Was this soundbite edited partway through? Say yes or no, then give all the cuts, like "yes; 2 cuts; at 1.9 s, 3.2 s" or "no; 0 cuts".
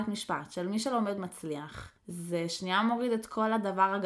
yes; 1 cut; at 2.0 s